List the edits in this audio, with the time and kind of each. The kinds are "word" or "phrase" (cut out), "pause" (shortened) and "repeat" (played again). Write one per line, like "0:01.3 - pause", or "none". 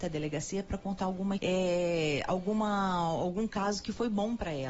0:01.4 - word